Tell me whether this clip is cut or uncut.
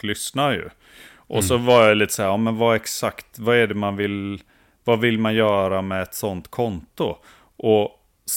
uncut